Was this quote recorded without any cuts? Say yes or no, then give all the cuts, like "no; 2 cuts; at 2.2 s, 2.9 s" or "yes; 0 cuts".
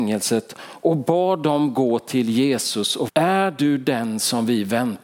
no; 1 cut; at 3.1 s